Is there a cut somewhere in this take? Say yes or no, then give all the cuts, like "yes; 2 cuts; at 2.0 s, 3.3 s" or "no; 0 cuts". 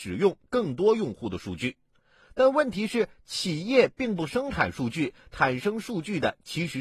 no; 0 cuts